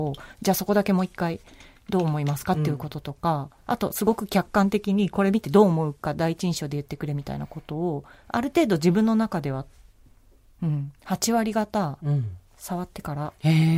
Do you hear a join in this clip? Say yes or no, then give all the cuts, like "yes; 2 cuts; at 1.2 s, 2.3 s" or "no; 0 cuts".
yes; 2 cuts; at 3.6 s, 12.5 s